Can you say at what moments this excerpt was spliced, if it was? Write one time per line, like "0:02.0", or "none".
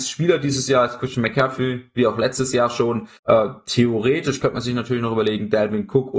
0:03.2